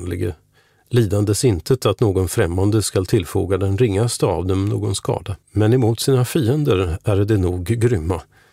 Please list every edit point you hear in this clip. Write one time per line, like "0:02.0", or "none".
0:05.4